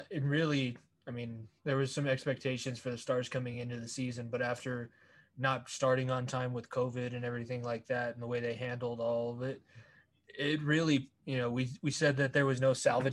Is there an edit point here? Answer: no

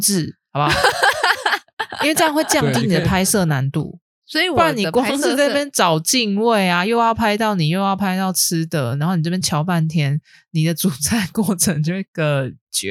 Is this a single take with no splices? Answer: yes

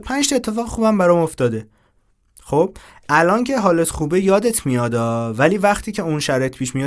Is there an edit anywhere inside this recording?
no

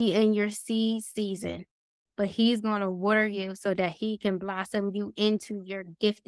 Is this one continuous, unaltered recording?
yes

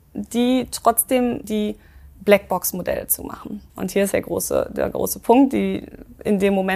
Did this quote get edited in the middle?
yes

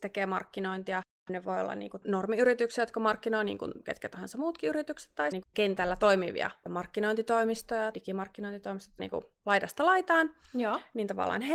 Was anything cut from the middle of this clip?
yes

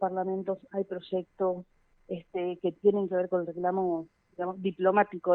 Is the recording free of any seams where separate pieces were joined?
yes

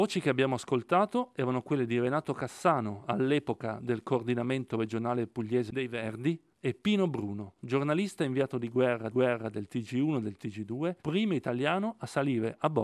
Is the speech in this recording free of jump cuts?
no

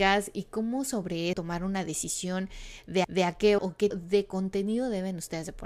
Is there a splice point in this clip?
yes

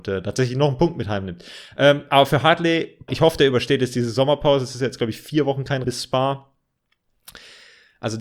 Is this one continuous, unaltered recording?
no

